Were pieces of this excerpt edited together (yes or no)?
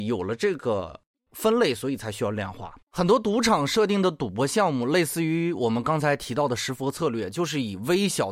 yes